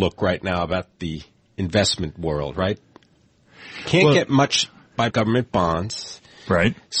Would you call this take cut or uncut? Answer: cut